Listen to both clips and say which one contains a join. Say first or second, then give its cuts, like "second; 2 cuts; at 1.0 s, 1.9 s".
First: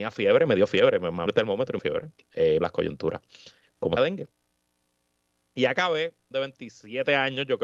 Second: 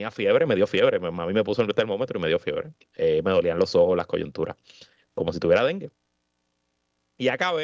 first; 5 cuts; at 1.3 s, 1.8 s, 2.6 s, 4.0 s, 6.3 s